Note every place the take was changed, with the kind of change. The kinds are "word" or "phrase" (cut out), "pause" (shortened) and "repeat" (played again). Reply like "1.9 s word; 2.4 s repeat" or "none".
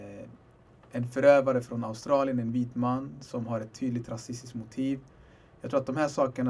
none